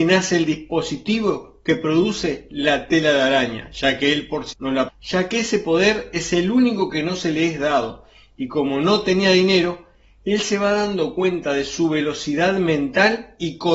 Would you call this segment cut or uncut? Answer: cut